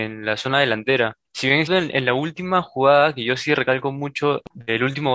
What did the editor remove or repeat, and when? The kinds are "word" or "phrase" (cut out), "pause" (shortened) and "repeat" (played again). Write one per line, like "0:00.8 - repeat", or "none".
0:01.2 - pause
0:01.7 - word

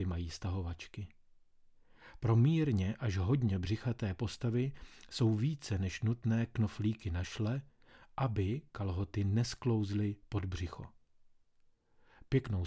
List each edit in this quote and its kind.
none

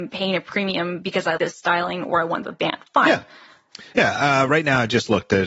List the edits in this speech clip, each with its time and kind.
0:01.4 - word
0:02.4 - phrase
0:02.9 - pause

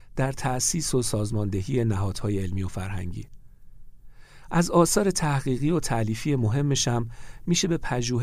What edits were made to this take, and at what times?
none

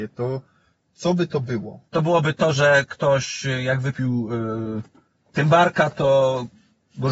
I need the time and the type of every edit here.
0:01.9 - pause

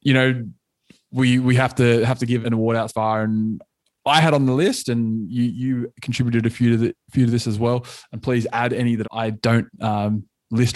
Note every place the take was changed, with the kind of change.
0:02.4 - word
0:02.9 - word
0:09.0 - word

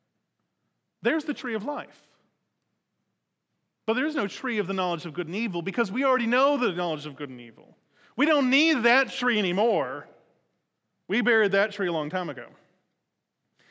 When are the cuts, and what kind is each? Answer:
none

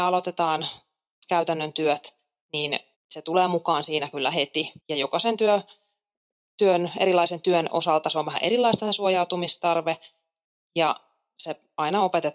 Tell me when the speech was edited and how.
0:02.9 - pause
0:04.8 - pause

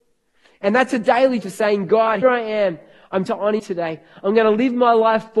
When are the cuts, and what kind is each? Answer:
0:01.4 - word
0:02.2 - word
0:03.3 - word
0:03.6 - word

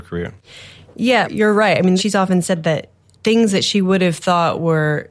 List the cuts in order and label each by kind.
none

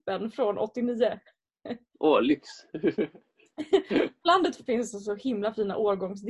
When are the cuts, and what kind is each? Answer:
0:02.7 - pause
0:04.7 - phrase

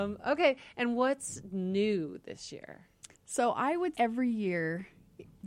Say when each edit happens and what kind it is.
0:03.1 - pause
0:03.9 - word

